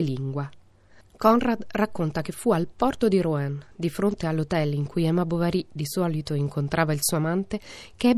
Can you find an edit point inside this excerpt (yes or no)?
no